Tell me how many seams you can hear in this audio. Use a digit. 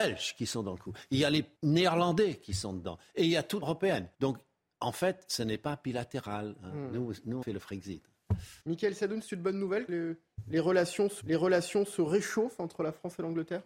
7